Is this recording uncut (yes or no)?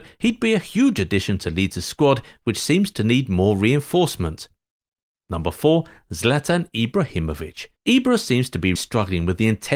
no